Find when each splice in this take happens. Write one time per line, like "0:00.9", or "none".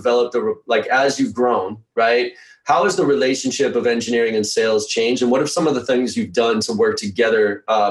none